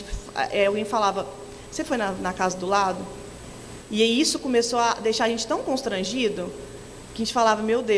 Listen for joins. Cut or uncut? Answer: uncut